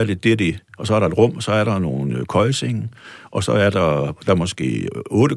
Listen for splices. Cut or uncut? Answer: uncut